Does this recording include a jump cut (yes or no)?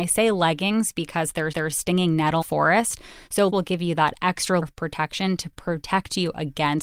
yes